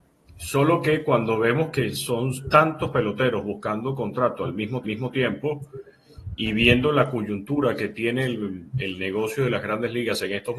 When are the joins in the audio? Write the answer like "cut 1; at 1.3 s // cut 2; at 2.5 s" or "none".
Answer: cut 1; at 4.8 s